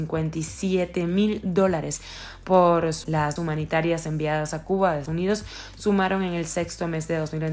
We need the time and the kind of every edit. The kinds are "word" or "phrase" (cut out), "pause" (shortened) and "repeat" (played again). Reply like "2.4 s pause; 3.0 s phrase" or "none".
3.0 s word; 3.4 s word; 5.1 s word

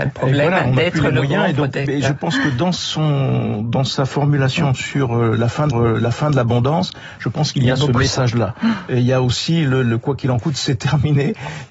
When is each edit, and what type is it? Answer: 5.7 s repeat

